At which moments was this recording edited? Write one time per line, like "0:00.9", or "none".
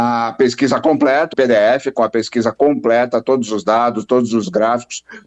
0:01.3